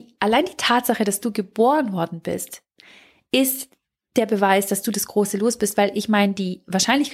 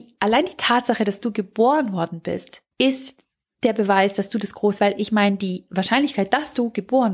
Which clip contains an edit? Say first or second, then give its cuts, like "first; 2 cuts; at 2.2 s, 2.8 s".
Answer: second; 2 cuts; at 2.7 s, 4.8 s